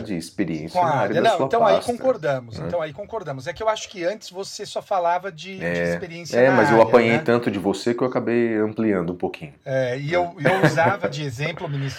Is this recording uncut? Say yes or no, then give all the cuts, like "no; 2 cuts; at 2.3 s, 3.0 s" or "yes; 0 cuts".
yes; 0 cuts